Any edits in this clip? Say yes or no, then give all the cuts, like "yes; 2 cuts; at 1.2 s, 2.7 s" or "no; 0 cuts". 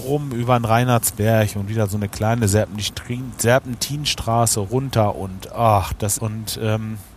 yes; 1 cut; at 6.2 s